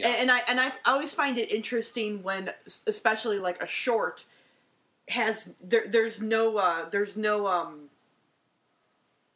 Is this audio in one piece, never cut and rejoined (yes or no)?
yes